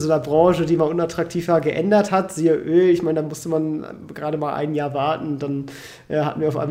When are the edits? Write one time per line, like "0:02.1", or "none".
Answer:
none